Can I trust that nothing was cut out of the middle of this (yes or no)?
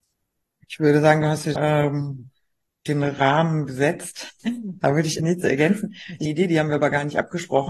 no